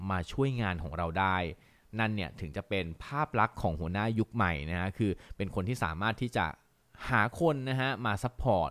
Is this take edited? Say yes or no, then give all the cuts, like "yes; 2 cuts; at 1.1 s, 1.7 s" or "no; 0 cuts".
no; 0 cuts